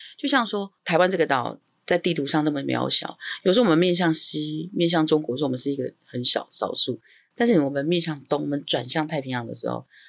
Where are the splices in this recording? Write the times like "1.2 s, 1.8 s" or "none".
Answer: none